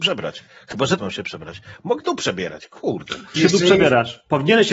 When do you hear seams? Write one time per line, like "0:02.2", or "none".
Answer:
0:01.0
0:02.0
0:03.4

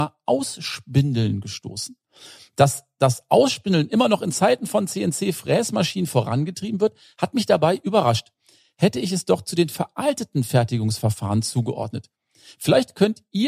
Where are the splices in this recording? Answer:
none

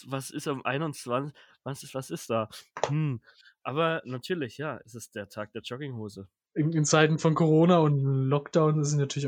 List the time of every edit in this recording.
none

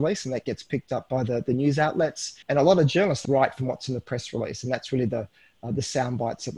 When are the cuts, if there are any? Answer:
0:02.4
0:03.2

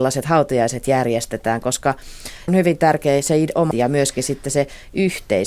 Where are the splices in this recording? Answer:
0:02.5
0:03.7

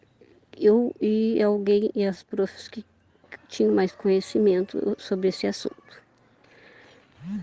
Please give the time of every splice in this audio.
none

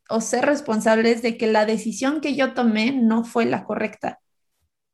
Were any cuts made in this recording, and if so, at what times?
none

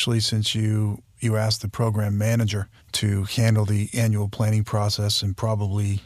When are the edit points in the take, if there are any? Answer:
0:02.8

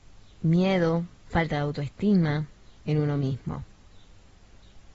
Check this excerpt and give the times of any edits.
0:01.2
0:02.8

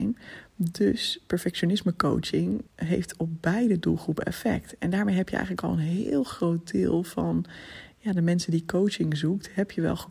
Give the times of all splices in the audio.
0:02.7

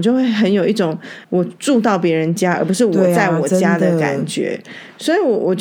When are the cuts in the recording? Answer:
0:01.2

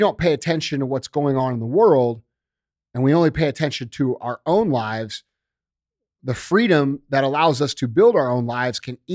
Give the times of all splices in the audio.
none

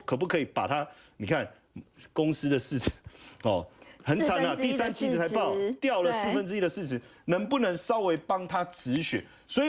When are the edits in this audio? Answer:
none

